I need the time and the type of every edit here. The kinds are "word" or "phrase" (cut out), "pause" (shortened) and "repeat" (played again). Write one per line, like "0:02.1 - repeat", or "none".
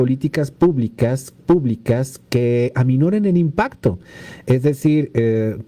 0:01.4 - repeat